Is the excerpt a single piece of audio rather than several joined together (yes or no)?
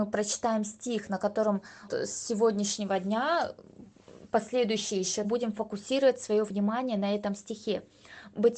no